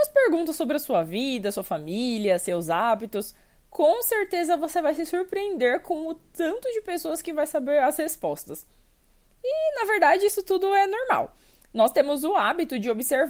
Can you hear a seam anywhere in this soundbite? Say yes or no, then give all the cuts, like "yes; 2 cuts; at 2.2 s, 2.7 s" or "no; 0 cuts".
no; 0 cuts